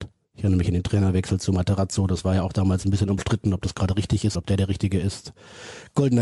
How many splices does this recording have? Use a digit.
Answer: 1